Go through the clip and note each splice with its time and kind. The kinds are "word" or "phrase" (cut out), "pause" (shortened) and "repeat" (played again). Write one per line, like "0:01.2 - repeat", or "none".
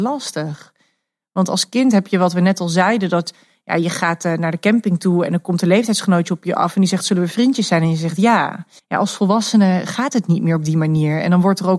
0:08.8 - pause

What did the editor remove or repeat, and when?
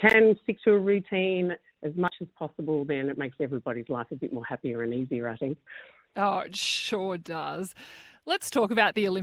none

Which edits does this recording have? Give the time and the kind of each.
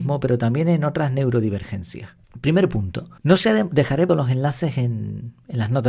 0:02.2 - pause
0:03.2 - pause
0:04.1 - phrase

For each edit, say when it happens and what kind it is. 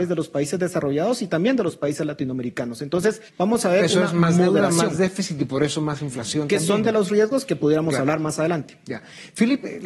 0:03.3 - pause

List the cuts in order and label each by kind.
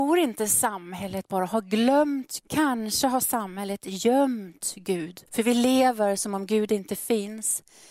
0:02.4 - word
0:05.3 - pause

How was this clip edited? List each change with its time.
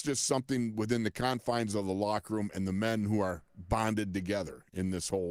none

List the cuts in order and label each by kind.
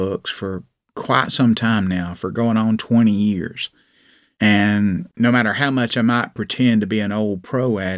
0:05.1 - pause

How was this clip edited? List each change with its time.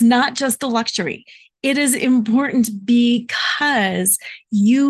none

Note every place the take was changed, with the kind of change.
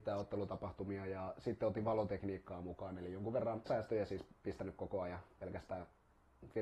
0:03.7 - word

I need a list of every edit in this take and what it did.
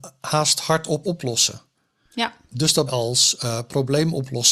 0:01.0 - word
0:02.9 - phrase

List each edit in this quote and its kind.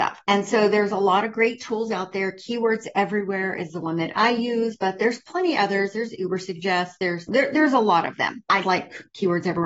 0:08.6 - word

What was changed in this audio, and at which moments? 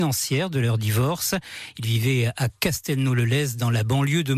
none

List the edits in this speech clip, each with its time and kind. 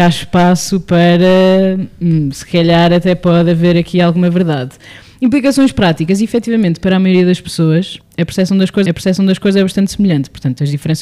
0:08.0 - pause
0:08.9 - repeat

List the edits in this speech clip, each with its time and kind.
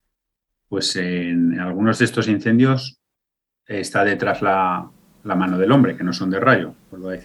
none

